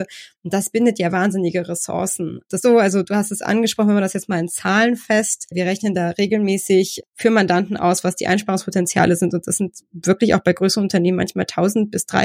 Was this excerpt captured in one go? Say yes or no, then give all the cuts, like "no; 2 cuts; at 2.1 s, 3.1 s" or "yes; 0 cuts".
no; 1 cut; at 2.6 s